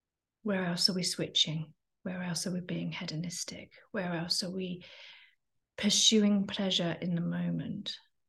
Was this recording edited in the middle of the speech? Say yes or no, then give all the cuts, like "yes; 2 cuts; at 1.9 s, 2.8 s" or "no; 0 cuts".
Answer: no; 0 cuts